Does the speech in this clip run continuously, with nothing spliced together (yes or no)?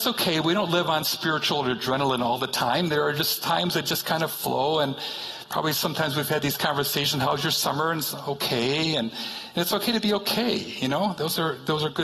yes